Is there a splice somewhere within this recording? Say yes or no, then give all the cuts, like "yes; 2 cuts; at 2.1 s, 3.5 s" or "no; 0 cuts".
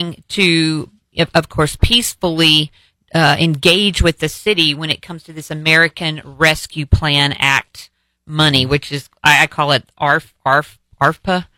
no; 0 cuts